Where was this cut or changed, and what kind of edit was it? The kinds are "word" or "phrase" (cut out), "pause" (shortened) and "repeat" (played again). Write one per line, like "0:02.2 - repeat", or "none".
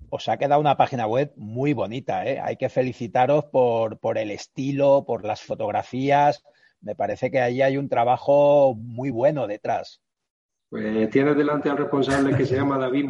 none